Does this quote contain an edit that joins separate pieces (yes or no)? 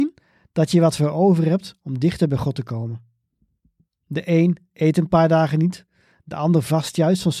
no